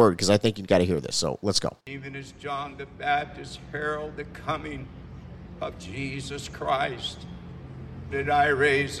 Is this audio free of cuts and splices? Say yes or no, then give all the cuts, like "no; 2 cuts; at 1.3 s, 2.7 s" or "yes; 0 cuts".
no; 2 cuts; at 1.8 s, 8.1 s